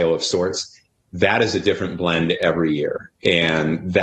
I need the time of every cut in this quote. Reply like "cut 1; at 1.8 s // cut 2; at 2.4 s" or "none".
none